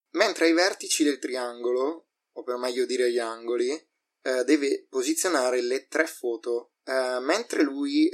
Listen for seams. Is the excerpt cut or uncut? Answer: cut